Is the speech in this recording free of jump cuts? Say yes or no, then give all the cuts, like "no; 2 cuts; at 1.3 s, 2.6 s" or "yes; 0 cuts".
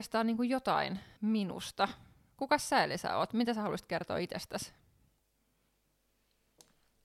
no; 1 cut; at 1.2 s